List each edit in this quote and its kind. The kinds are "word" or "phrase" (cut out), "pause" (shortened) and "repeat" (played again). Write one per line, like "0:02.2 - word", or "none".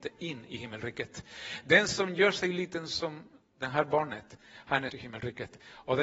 0:04.9 - word